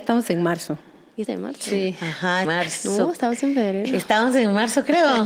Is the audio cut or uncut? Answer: cut